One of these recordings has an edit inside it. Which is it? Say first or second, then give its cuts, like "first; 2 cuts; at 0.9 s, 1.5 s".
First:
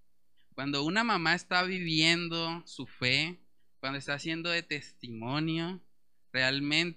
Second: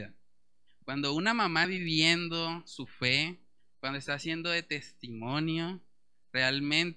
second; 1 cut; at 1.6 s